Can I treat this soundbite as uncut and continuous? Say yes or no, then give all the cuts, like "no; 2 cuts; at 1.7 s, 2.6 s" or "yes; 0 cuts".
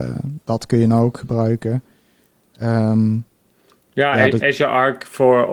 yes; 0 cuts